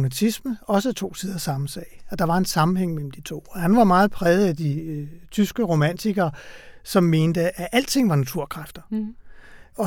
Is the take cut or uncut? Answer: uncut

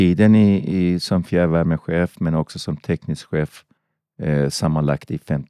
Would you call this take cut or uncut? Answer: cut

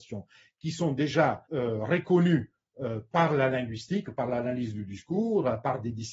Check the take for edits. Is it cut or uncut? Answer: cut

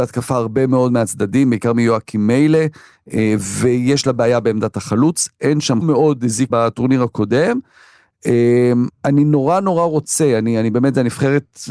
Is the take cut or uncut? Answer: cut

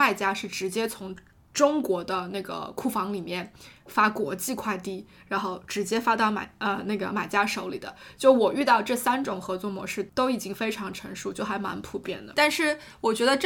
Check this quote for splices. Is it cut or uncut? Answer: uncut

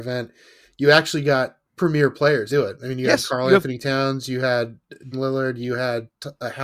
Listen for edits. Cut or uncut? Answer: cut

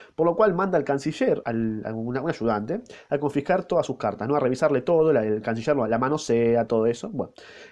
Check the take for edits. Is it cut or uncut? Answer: cut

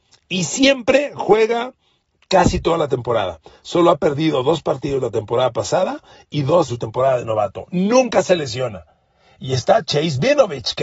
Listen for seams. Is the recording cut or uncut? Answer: cut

